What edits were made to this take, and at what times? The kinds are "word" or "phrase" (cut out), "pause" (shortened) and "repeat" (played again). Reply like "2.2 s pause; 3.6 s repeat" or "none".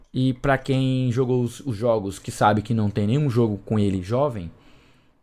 none